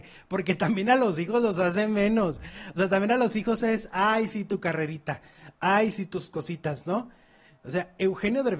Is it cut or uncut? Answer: uncut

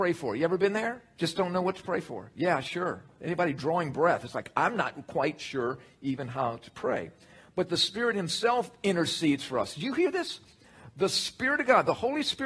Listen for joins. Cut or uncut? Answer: uncut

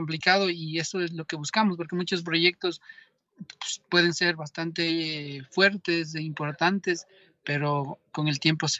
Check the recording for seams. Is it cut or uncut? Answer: uncut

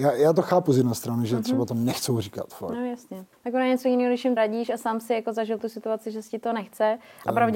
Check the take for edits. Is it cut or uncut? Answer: cut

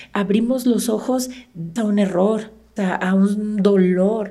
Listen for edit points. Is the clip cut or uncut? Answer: cut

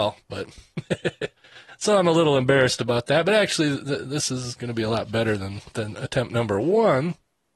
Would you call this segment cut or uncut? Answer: cut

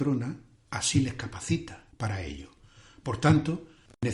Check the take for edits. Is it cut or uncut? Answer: uncut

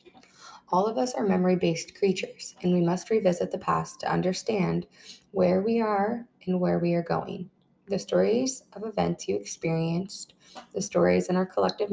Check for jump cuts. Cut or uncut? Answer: uncut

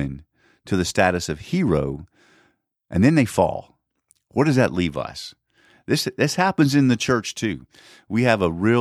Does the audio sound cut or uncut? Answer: uncut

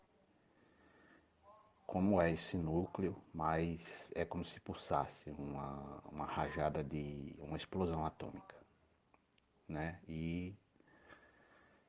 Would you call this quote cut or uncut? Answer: uncut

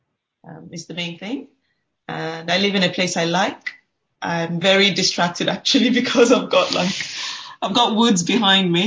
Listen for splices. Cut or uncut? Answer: uncut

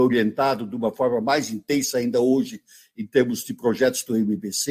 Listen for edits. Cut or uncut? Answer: uncut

